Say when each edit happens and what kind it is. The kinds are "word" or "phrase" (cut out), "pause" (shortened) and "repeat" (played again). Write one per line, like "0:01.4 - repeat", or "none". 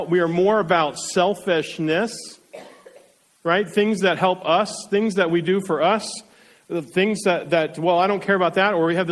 none